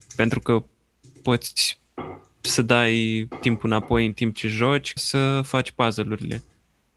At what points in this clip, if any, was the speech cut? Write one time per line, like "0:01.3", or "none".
0:05.0